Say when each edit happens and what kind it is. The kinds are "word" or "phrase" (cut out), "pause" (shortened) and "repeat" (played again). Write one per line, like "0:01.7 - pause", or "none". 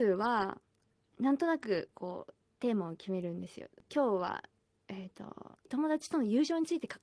none

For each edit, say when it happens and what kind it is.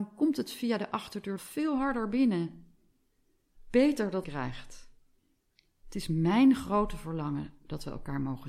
0:01.4 - word
0:04.2 - phrase
0:05.2 - pause

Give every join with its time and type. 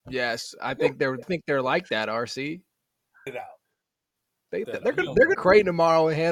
0:01.2 - word
0:03.3 - word
0:04.6 - word
0:05.3 - phrase

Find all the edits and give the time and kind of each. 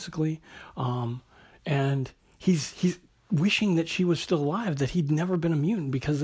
0:03.1 - pause

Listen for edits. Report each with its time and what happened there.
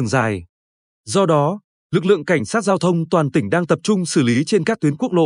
none

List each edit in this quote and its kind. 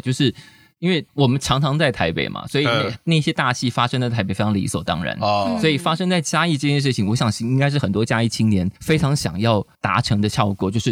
0:01.1 - pause
0:08.8 - pause
0:09.7 - pause

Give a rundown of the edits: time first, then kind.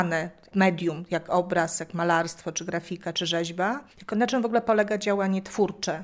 0:03.9 - pause

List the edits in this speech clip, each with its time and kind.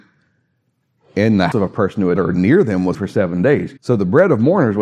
0:01.5 - word
0:02.2 - word
0:02.9 - word
0:03.8 - pause

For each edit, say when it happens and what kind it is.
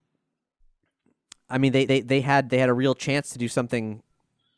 0:01.9 - repeat

